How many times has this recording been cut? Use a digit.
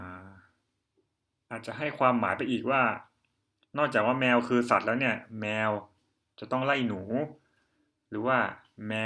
0